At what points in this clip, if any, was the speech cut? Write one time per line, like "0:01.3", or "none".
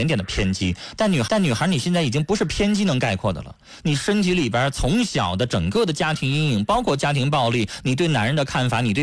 0:01.3